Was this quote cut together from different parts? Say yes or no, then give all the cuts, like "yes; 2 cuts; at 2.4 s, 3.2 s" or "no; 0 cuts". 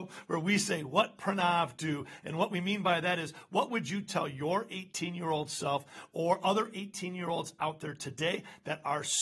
no; 0 cuts